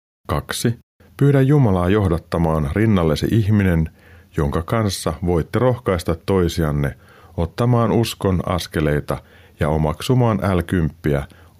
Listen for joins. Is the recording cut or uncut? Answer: uncut